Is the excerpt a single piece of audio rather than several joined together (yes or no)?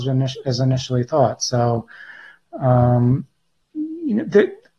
yes